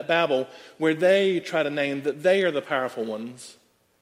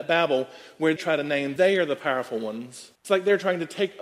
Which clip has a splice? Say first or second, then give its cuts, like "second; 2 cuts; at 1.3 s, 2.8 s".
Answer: second; 3 cuts; at 1.0 s, 1.6 s, 2.9 s